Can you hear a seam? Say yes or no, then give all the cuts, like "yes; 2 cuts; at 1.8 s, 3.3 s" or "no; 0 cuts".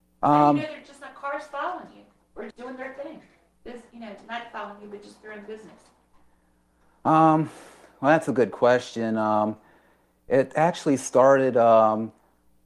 yes; 1 cut; at 2.5 s